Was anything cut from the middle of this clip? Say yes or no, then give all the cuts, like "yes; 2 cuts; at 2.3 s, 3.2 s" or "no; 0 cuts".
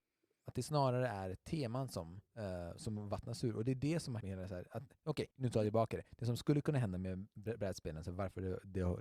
yes; 3 cuts; at 2.3 s, 4.2 s, 5.3 s